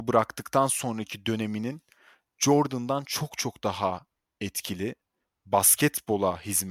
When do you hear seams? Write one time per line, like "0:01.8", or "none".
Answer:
none